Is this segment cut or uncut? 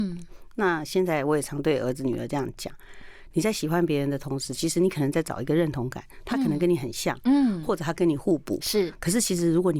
uncut